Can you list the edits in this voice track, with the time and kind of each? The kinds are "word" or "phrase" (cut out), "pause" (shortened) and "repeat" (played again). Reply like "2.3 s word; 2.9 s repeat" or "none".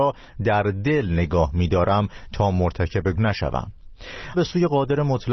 3.1 s word; 4.3 s word